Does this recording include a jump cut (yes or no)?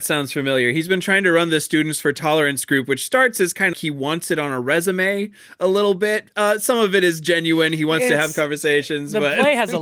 yes